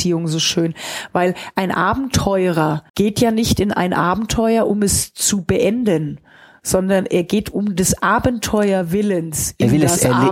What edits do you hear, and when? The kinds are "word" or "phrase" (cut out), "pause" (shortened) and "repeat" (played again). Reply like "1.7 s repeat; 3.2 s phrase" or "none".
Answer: 2.9 s pause